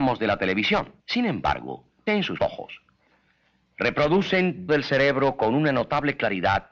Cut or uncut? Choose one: cut